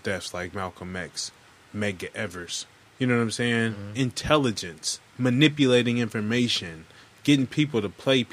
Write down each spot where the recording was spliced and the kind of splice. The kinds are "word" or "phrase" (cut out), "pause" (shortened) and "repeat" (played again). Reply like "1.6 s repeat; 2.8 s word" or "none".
1.6 s pause; 2.8 s pause; 5.1 s pause

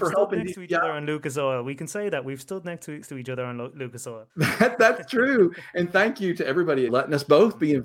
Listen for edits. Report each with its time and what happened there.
3.0 s word; 4.3 s pause; 6.9 s phrase

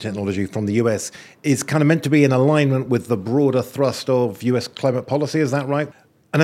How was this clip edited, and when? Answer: none

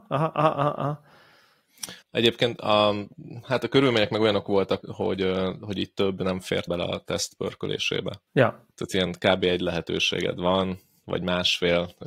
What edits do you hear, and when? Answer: 2.0 s pause; 4.8 s word; 6.7 s word; 8.3 s pause

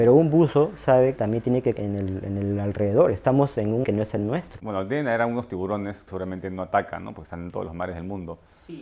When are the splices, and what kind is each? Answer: 1.2 s word; 1.8 s word; 3.8 s word; 6.1 s word

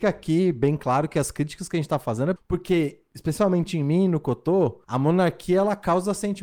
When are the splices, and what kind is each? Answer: 2.4 s word; 4.8 s pause

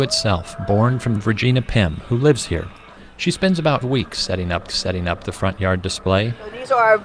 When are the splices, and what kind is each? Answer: 1.2 s phrase; 3.8 s word; 4.7 s repeat

